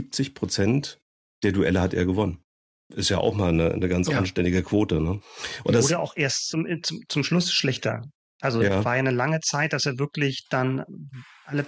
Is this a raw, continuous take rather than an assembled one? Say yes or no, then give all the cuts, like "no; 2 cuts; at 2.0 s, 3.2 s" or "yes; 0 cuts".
yes; 0 cuts